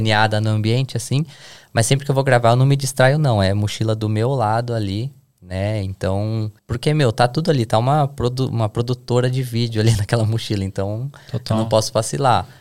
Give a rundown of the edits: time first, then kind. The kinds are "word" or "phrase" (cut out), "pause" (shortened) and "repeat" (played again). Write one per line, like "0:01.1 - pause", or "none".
0:06.6 - pause